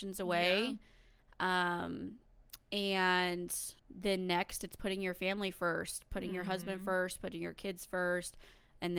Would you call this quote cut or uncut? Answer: cut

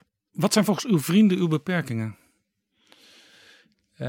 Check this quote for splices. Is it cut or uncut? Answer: uncut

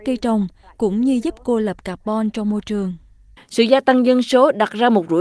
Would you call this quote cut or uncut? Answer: uncut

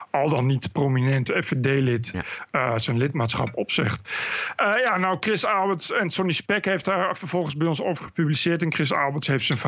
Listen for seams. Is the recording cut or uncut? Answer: uncut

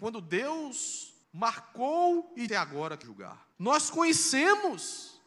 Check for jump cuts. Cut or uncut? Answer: cut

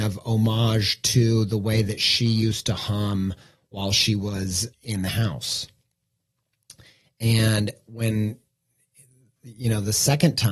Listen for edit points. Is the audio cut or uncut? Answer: cut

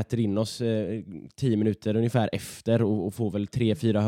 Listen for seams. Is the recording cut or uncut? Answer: uncut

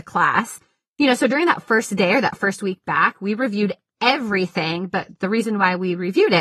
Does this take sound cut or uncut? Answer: uncut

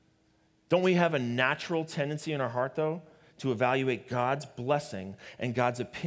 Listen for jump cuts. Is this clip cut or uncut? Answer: uncut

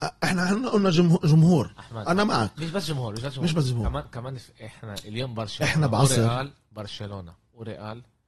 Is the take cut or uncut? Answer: uncut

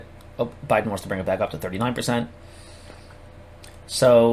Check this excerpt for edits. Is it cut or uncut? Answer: uncut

